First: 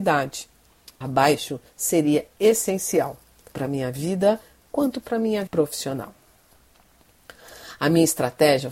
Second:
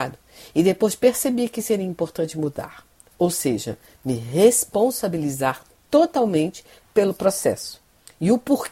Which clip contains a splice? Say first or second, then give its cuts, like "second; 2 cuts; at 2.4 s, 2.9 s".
first; 4 cuts; at 1.0 s, 3.5 s, 4.6 s, 5.5 s